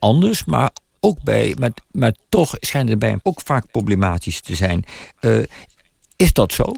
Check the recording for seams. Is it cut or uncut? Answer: cut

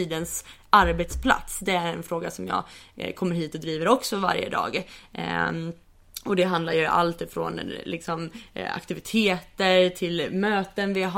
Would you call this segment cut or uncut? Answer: uncut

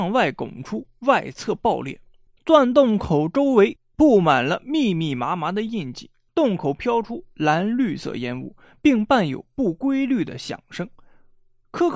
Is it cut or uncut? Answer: uncut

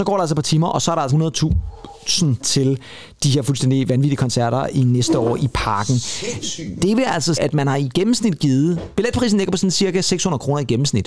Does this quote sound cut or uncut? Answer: cut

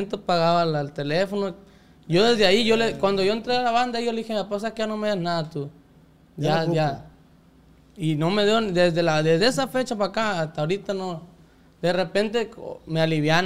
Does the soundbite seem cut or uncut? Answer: uncut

